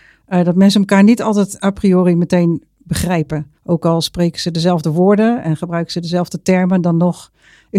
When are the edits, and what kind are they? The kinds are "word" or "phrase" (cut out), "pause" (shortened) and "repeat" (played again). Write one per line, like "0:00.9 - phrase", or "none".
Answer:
0:03.5 - pause

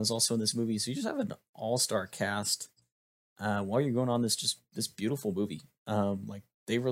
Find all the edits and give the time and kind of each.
none

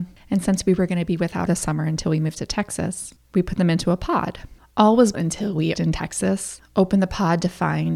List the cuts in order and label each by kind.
0:01.5 - phrase
0:05.1 - word
0:05.7 - word

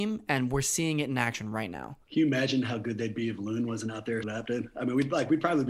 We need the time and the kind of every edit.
0:02.0 - pause
0:04.2 - word

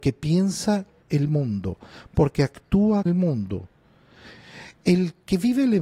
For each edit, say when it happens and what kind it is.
0:01.0 - word
0:03.1 - word

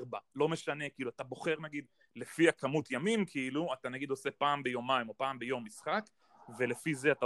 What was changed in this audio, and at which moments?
none

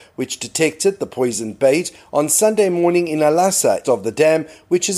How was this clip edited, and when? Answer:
0:03.8 - word

